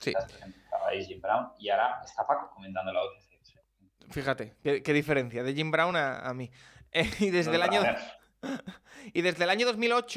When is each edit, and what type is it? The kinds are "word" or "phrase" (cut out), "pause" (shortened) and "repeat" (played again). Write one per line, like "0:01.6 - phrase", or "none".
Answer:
none

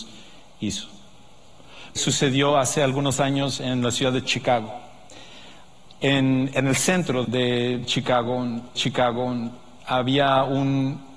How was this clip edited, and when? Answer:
0:02.0 - phrase
0:07.2 - word
0:08.7 - repeat

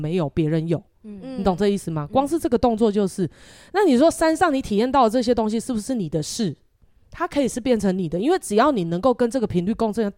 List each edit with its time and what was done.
none

